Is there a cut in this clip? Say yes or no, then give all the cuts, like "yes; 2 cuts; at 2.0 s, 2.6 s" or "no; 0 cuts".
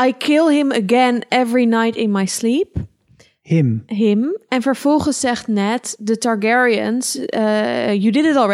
no; 0 cuts